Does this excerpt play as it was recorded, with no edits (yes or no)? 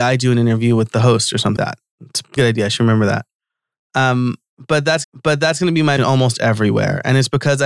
no